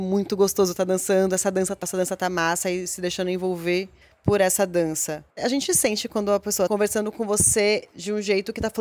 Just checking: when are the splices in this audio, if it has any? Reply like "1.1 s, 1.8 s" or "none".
1.8 s, 4.0 s, 5.3 s, 6.7 s